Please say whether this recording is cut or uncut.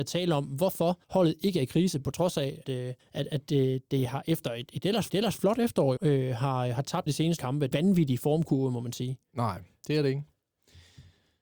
cut